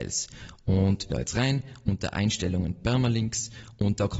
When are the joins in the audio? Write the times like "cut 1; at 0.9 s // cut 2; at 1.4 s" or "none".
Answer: cut 1; at 1.1 s